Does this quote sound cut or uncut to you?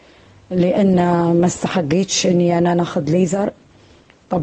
uncut